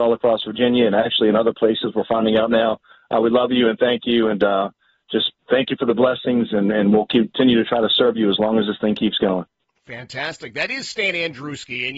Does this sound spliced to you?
no; 0 cuts

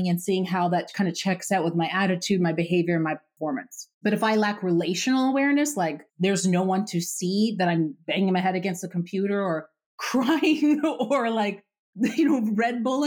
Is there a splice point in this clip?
yes; 2 cuts; at 3.9 s, 6.1 s

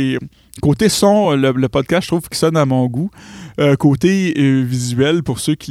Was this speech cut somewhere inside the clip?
no; 0 cuts

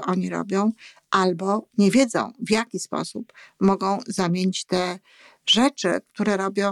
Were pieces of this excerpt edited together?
no; 0 cuts

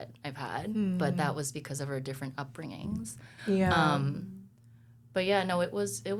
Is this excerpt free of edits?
yes; 0 cuts

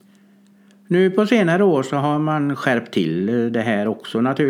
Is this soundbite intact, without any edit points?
yes; 0 cuts

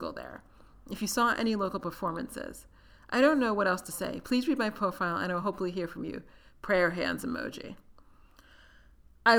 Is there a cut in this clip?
no; 0 cuts

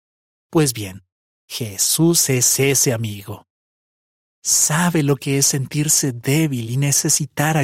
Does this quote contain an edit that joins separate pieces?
no; 0 cuts

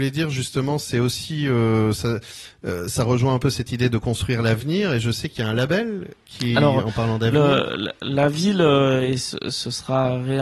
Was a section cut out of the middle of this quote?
no; 0 cuts

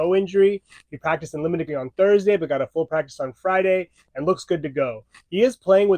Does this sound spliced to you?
yes; 1 cut; at 1.7 s

